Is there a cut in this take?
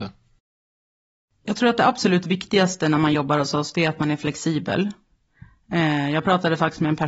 no; 0 cuts

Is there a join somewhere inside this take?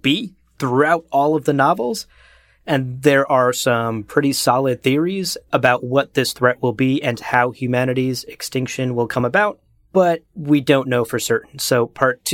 no; 0 cuts

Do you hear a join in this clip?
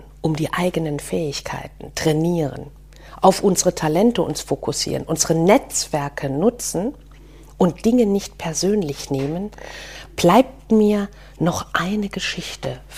no; 0 cuts

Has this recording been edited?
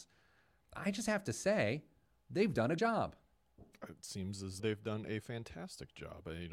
yes; 2 cuts; at 2.8 s, 4.6 s

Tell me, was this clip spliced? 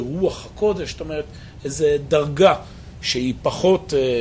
no; 0 cuts

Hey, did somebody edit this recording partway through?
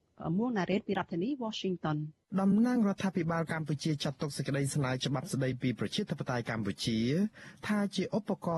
yes; 1 cut; at 2.2 s

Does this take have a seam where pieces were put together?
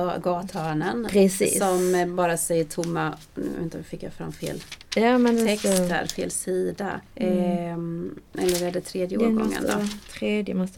yes; 2 cuts; at 7.1 s, 8.3 s

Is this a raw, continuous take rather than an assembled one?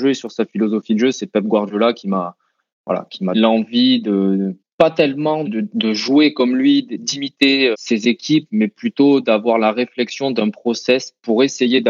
no; 3 cuts; at 3.3 s, 5.4 s, 7.7 s

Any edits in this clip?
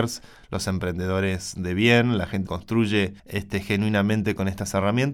yes; 2 cuts; at 2.5 s, 3.2 s

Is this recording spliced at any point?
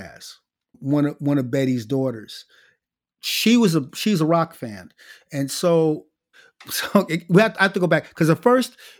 no; 0 cuts

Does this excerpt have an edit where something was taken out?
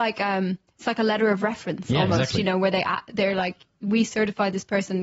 no; 0 cuts

